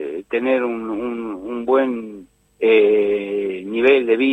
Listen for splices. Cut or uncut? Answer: cut